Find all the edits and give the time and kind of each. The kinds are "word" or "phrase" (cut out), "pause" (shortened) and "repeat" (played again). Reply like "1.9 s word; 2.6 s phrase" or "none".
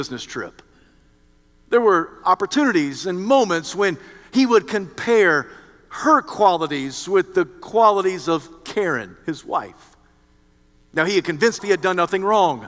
11.6 s word